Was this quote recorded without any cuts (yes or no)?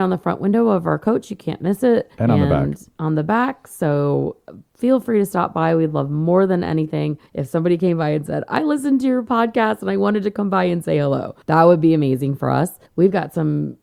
no